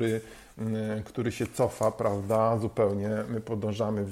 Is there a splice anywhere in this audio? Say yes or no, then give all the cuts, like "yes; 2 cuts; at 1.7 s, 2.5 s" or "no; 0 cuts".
no; 0 cuts